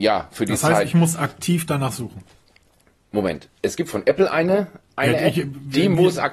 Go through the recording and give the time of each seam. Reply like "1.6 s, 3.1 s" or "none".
none